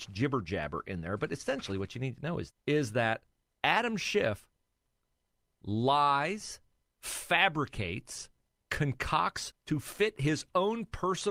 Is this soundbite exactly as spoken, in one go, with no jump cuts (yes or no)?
no